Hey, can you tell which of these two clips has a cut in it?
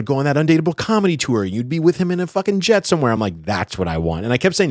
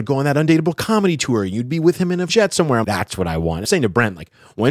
second; 3 cuts; at 2.3 s, 2.8 s, 3.6 s

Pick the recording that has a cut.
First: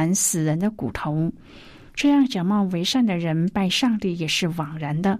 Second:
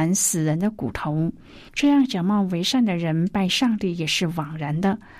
second; 1 cut; at 1.7 s

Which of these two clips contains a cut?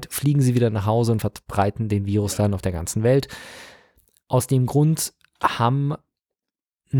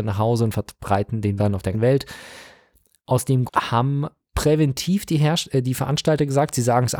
second; 4 cuts; at 1.4 s, 1.7 s, 3.5 s, 4.3 s

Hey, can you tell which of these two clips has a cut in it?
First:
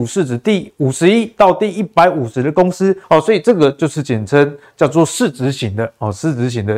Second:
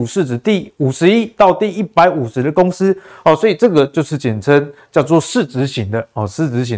first; 1 cut; at 3.0 s

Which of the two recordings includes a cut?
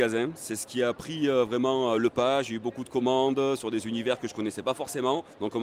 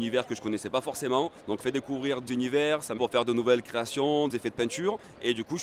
second; 4 cuts; at 1.6 s, 2.3 s, 3.0 s, 4.3 s

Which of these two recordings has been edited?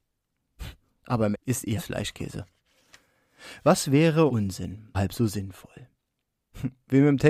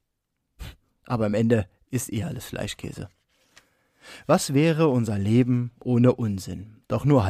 first; 4 cuts; at 1.3 s, 1.8 s, 4.3 s, 4.9 s

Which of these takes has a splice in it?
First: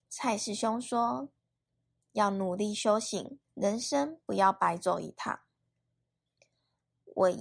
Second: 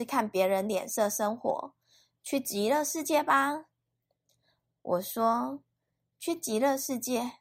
first; 2 cuts; at 1.4 s, 3.4 s

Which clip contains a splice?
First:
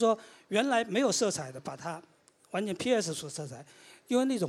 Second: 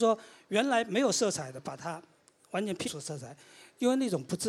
second; 1 cut; at 2.9 s

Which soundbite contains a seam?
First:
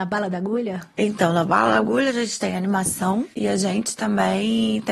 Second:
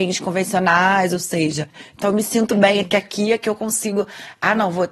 first; 1 cut; at 3.3 s

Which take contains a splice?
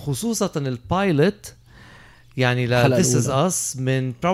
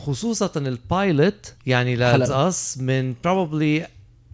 second; 2 cuts; at 1.6 s, 2.3 s

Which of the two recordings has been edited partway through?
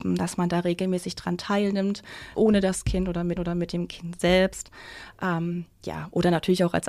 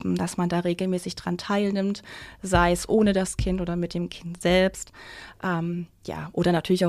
first; 2 cuts; at 2.3 s, 3.4 s

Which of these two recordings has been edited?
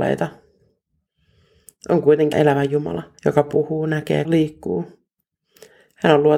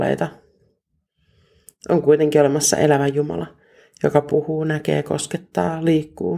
first; 3 cuts; at 2.3 s, 3.2 s, 4.2 s

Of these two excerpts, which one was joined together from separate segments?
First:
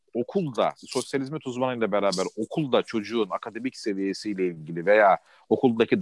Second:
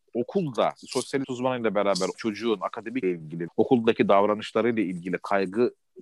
second; 4 cuts; at 1.2 s, 2.1 s, 3.0 s, 3.5 s

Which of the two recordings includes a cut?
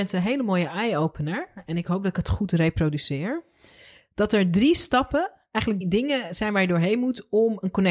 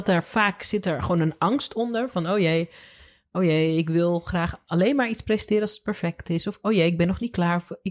first; 1 cut; at 5.8 s

